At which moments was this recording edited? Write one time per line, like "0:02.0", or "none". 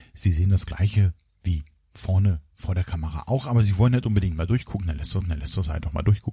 0:05.2